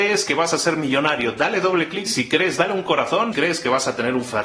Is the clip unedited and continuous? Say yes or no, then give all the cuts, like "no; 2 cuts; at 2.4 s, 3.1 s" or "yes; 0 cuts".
no; 2 cuts; at 2.1 s, 3.3 s